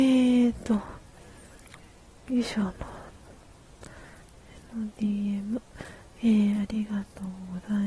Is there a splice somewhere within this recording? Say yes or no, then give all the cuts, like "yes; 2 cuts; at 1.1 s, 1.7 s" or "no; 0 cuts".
no; 0 cuts